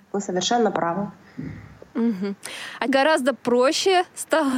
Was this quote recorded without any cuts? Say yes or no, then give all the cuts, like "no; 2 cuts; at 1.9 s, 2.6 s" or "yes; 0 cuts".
no; 1 cut; at 2.9 s